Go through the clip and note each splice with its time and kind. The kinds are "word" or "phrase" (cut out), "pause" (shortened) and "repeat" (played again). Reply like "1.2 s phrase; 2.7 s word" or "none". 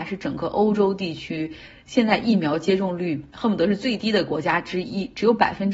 3.3 s pause